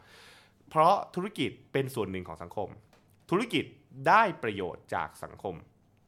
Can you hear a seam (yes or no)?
no